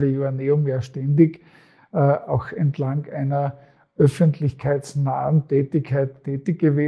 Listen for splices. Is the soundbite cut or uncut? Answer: uncut